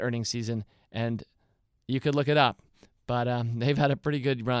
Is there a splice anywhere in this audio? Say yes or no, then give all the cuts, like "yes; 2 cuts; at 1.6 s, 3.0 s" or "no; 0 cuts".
no; 0 cuts